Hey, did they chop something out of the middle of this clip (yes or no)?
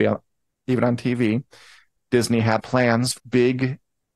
yes